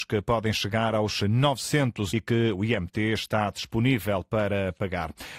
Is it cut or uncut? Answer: cut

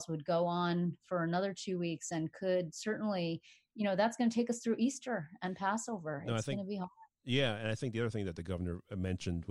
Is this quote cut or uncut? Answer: uncut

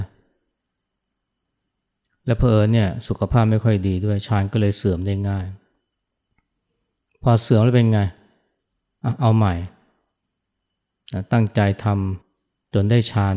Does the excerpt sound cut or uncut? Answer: cut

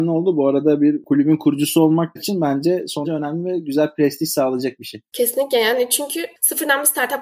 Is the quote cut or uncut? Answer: cut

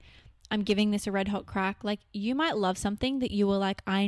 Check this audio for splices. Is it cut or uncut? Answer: uncut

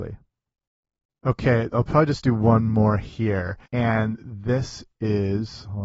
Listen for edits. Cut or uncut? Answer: cut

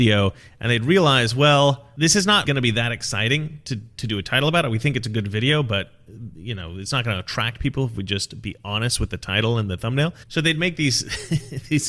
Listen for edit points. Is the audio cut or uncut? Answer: cut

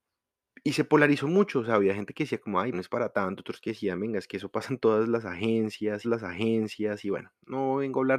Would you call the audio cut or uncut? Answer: cut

